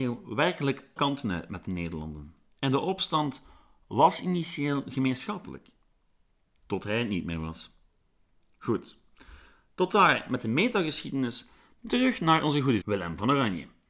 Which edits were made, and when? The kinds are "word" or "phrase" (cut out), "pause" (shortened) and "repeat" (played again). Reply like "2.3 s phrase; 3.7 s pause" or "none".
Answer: 1.0 s word; 12.8 s word